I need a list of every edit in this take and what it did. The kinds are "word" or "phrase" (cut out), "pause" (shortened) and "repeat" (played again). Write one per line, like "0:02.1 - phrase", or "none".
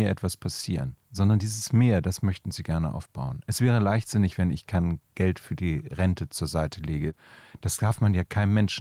0:05.0 - pause

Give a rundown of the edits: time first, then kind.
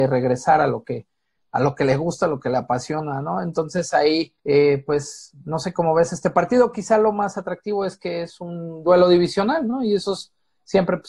0:04.4 - pause

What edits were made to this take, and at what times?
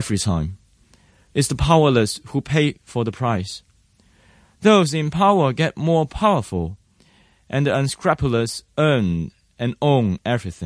none

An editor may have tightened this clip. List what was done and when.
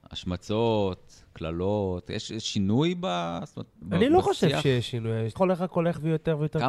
0:03.8 - pause
0:05.3 - word

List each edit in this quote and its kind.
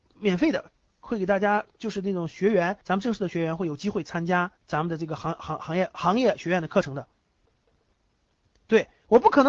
0:02.8 - pause
0:04.6 - pause

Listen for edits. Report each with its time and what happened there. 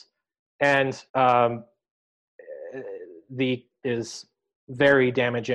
0:01.1 - pause
0:03.8 - phrase

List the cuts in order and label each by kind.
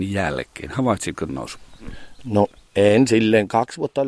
0:01.3 - phrase

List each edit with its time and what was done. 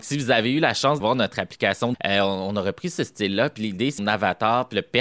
0:01.0 - word
0:01.9 - word
0:04.0 - phrase

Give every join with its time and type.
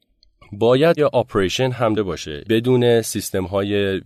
0:01.0 - word
0:02.0 - word
0:02.4 - word

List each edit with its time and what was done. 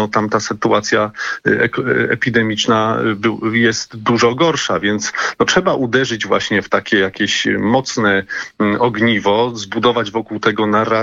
none

